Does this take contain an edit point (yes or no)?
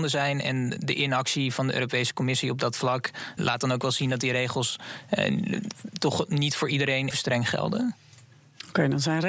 yes